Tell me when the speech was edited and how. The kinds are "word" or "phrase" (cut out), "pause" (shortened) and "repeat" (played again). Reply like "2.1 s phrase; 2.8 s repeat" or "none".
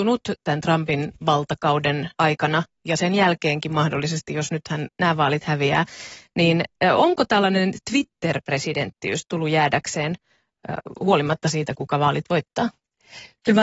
2.1 s pause